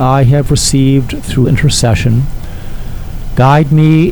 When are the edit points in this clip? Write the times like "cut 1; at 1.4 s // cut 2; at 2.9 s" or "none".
cut 1; at 1.4 s